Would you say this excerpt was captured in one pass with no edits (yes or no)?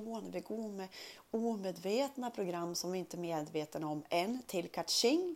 yes